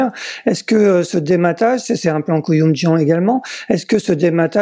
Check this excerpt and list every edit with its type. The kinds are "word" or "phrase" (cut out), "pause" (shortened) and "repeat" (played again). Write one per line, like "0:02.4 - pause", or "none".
none

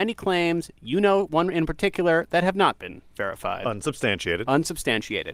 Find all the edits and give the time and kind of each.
none

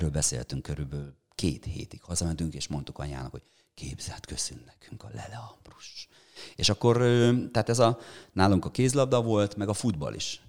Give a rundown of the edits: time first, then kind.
none

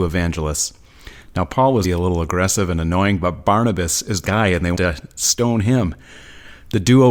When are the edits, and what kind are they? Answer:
0:01.8 - word
0:04.2 - phrase
0:04.7 - word

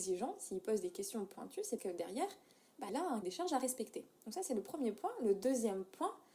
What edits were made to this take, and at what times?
0:01.8 - word
0:02.9 - word
0:03.2 - word

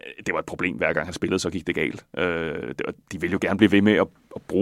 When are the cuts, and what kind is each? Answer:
0:03.0 - pause

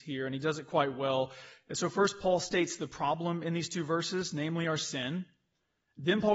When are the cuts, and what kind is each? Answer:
none

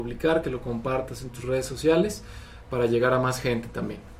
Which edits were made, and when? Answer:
none

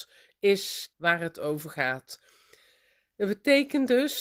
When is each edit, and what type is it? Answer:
0:00.9 - phrase

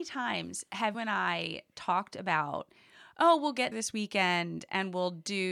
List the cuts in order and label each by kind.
0:00.9 - word
0:03.7 - word

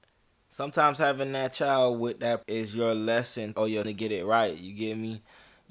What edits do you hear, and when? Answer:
0:02.4 - word
0:03.5 - phrase
0:03.8 - word

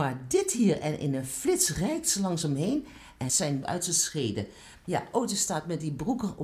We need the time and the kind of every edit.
0:03.3 - word
0:03.6 - word

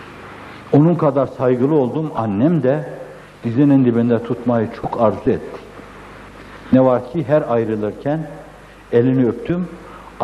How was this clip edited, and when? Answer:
none

